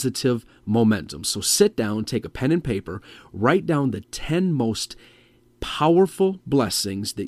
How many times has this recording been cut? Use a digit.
0